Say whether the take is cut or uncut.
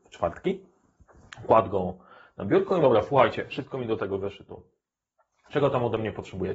cut